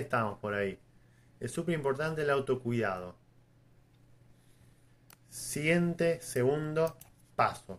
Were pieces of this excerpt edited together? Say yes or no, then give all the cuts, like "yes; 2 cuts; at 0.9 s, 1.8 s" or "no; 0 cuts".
no; 0 cuts